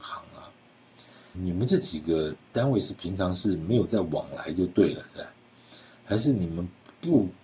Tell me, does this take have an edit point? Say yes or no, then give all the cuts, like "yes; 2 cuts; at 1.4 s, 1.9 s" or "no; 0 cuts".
yes; 1 cut; at 1.3 s